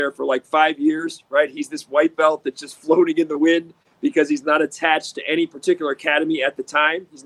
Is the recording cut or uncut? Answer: uncut